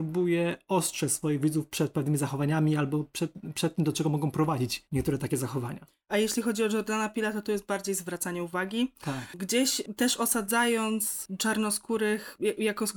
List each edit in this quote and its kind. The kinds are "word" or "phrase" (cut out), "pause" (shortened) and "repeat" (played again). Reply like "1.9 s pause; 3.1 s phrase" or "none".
none